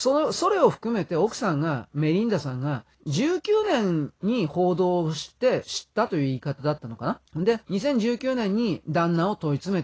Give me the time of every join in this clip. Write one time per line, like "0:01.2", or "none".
0:02.9
0:07.3
0:07.6